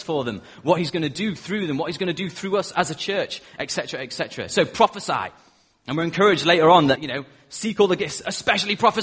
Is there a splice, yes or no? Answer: no